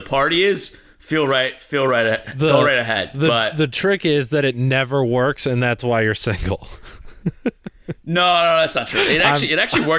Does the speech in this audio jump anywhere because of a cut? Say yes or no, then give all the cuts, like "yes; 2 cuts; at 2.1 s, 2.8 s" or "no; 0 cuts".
no; 0 cuts